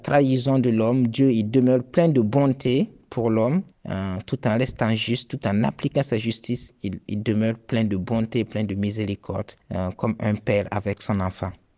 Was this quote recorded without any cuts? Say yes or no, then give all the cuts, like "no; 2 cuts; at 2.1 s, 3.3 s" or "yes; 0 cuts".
no; 2 cuts; at 3.7 s, 9.6 s